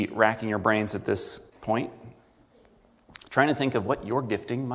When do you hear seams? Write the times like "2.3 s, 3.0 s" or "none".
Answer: 1.5 s